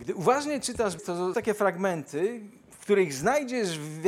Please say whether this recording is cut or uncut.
cut